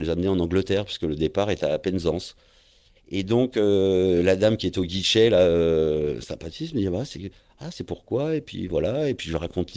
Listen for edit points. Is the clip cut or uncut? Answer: uncut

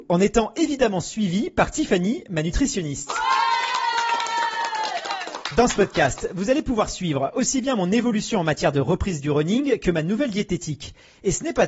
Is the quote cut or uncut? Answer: uncut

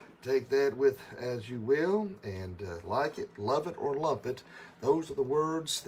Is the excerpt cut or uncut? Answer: uncut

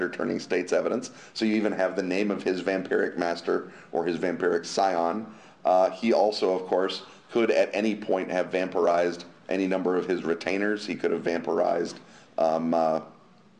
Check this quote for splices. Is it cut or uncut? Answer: uncut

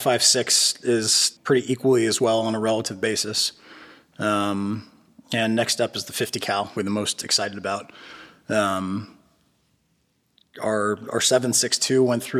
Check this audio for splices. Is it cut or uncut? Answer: cut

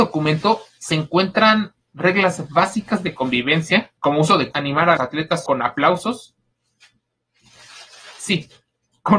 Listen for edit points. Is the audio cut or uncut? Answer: cut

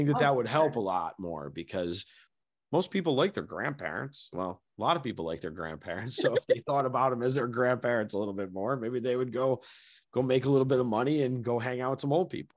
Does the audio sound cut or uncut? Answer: uncut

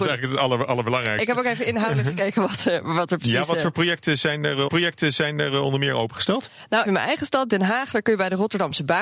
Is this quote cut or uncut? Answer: cut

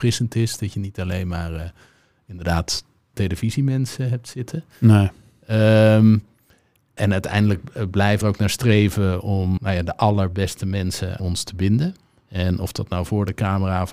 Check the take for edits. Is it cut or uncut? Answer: cut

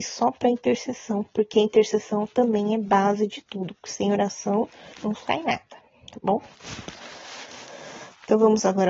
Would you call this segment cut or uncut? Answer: cut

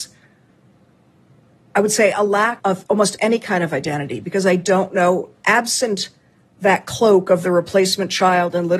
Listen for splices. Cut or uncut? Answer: cut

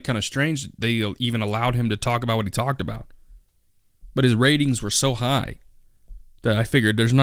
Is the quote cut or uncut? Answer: uncut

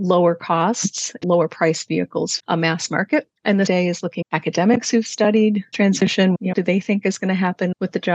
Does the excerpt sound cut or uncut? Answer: cut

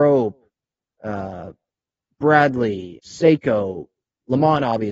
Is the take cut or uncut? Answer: cut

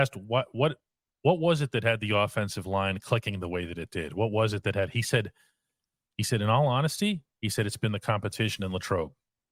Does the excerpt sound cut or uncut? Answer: uncut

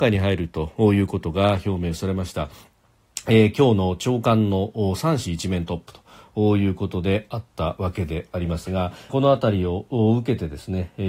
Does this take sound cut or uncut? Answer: cut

